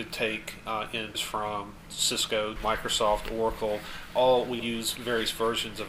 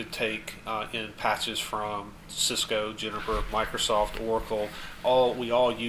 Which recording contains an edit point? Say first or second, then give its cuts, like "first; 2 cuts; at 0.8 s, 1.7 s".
first; 3 cuts; at 1.1 s, 2.6 s, 4.6 s